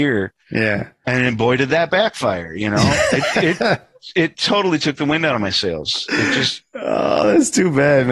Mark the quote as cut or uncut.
uncut